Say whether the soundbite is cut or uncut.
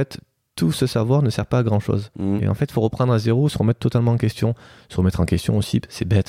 uncut